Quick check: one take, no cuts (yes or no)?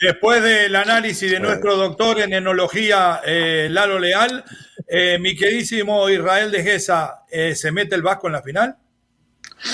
yes